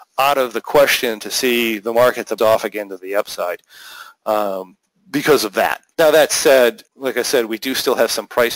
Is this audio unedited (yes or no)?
no